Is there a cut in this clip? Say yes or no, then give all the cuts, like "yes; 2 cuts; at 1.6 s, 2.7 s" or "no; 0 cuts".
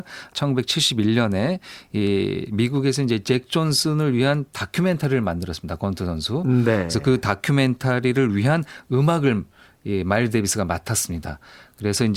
no; 0 cuts